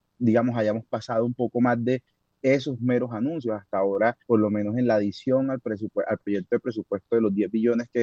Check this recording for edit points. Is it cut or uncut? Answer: cut